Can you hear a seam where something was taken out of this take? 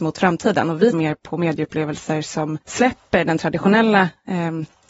yes; 2 cuts; at 0.9 s, 2.6 s

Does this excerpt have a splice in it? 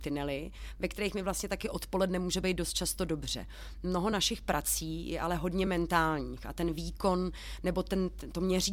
no; 0 cuts

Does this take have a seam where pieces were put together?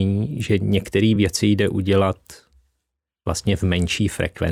no; 0 cuts

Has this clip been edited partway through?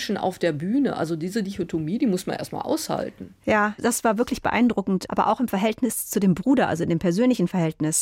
no; 0 cuts

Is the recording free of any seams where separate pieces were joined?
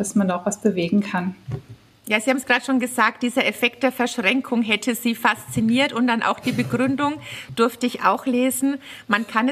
yes; 0 cuts

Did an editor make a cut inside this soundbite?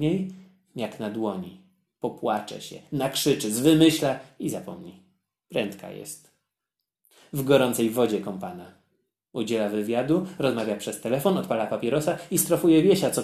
no; 0 cuts

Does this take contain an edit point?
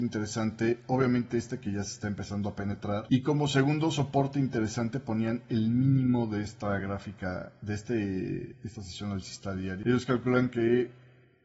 no; 0 cuts

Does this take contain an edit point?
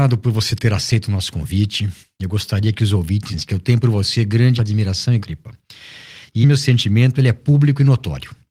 yes; 4 cuts; at 3.3 s, 4.6 s, 5.2 s, 6.4 s

